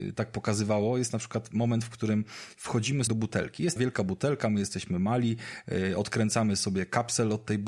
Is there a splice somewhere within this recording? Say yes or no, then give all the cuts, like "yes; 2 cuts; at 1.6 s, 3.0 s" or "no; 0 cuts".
yes; 2 cuts; at 3.1 s, 3.8 s